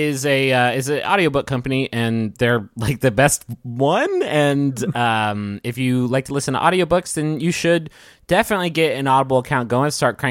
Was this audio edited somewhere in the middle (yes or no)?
no